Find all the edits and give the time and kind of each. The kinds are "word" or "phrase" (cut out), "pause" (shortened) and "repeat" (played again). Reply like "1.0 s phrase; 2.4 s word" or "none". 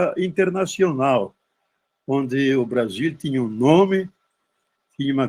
none

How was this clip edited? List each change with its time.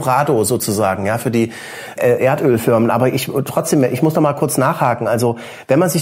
2.0 s word

